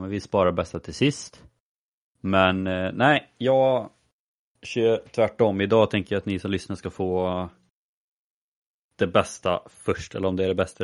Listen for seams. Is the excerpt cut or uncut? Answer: uncut